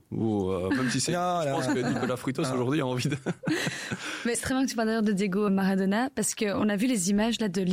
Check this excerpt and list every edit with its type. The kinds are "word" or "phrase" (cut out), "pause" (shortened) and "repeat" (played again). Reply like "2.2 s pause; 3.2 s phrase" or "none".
4.3 s word; 5.5 s word